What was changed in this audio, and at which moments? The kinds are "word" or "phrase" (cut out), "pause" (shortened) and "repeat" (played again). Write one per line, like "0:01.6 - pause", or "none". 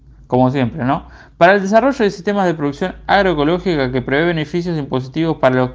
none